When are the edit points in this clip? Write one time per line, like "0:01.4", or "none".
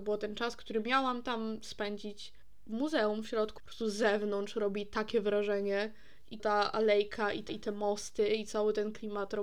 0:03.6
0:06.4
0:07.5